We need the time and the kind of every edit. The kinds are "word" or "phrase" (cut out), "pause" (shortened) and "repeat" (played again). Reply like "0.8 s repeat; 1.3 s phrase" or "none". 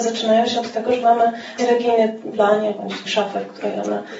1.0 s word; 1.6 s word; 2.3 s word; 3.1 s word